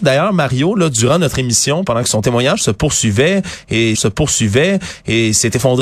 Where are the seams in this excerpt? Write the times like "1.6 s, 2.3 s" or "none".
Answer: 3.9 s